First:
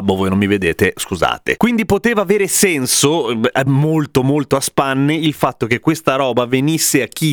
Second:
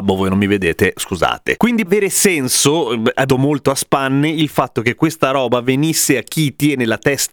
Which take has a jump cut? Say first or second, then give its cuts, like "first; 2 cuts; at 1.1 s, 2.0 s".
second; 2 cuts; at 1.9 s, 3.3 s